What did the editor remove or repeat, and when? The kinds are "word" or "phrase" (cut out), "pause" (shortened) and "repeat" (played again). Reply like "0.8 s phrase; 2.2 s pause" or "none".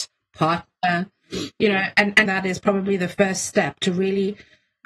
2.3 s word